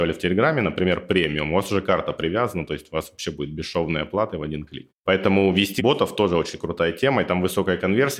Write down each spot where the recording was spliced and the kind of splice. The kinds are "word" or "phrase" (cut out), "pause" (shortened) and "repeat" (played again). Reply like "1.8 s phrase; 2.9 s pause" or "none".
5.8 s phrase